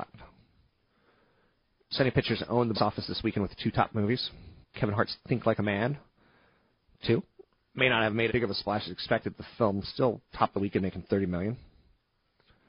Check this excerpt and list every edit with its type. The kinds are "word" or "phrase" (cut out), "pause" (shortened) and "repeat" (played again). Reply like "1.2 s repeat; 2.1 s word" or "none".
2.7 s word; 4.6 s pause; 7.5 s pause; 8.3 s word; 10.3 s pause